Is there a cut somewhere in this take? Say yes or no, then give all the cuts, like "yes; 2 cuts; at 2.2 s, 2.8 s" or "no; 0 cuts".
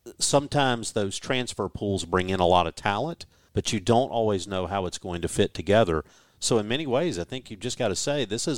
no; 0 cuts